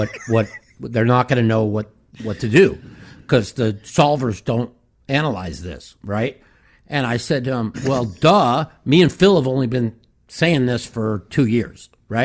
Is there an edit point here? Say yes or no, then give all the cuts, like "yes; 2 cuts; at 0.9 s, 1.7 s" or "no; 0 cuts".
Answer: no; 0 cuts